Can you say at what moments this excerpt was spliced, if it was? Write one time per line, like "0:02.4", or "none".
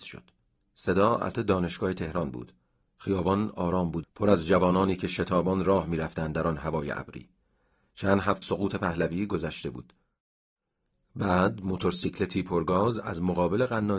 0:01.3
0:04.0
0:08.4